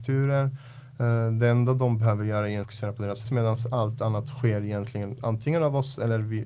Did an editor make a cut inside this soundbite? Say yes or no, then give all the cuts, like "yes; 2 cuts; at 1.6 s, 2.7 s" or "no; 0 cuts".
yes; 2 cuts; at 2.6 s, 3.2 s